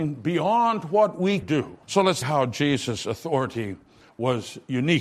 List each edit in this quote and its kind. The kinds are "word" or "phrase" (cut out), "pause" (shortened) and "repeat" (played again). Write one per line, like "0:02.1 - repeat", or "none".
0:01.4 - word
0:01.8 - pause
0:02.2 - phrase